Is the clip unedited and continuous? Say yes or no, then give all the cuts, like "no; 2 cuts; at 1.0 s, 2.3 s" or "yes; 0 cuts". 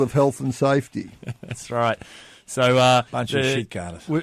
no; 1 cut; at 3.1 s